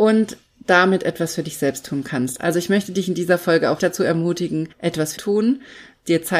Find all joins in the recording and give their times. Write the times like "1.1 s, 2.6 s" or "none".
3.8 s, 4.7 s, 5.2 s